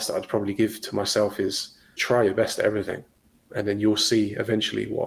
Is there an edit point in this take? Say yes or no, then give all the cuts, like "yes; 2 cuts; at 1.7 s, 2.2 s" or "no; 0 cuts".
yes; 2 cuts; at 2.0 s, 3.5 s